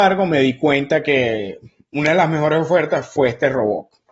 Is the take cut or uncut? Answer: uncut